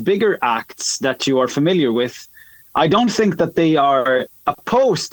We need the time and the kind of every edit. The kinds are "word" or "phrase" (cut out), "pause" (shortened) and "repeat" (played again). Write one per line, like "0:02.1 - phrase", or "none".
none